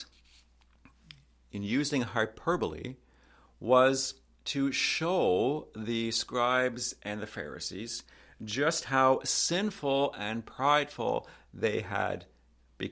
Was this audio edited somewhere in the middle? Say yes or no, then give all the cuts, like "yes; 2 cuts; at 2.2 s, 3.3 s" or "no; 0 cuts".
no; 0 cuts